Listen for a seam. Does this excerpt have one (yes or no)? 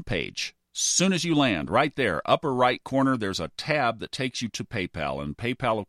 no